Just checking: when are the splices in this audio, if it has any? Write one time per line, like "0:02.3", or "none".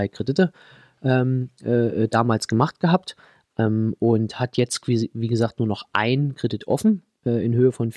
none